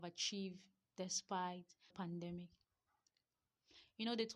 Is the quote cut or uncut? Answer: cut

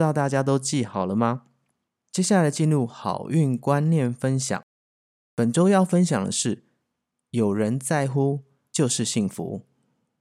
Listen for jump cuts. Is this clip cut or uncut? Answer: uncut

